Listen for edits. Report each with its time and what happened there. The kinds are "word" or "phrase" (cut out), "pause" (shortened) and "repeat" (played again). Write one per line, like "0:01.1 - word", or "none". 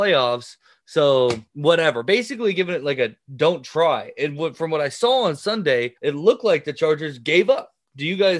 0:01.5 - pause
0:06.0 - pause